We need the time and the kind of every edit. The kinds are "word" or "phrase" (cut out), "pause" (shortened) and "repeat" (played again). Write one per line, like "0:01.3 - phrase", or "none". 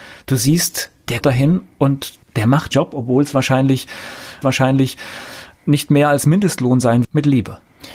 0:01.2 - word
0:02.7 - word
0:04.4 - repeat
0:07.0 - phrase

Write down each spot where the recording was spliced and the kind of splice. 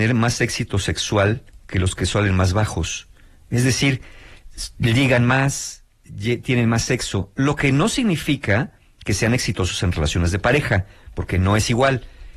none

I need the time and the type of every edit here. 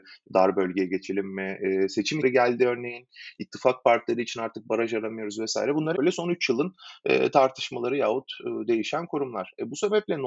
0:02.2 - word
0:05.9 - word

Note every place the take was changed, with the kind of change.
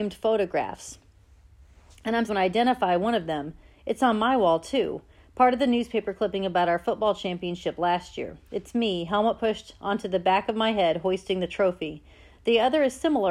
0:02.3 - word

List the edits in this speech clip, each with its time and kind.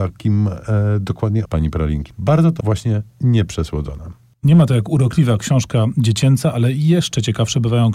0:01.4 - phrase
0:02.6 - phrase

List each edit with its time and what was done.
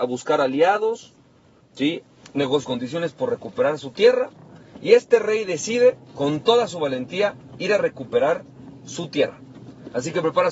0:02.6 - word

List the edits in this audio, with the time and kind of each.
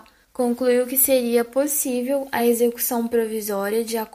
none

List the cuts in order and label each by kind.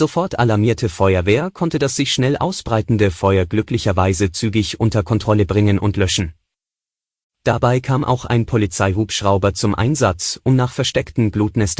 none

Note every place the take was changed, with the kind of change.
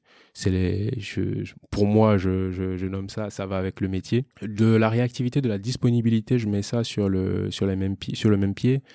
0:04.3 - pause

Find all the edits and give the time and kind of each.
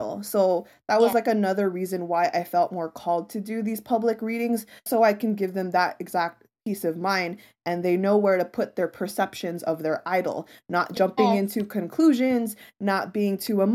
0:04.9 - word

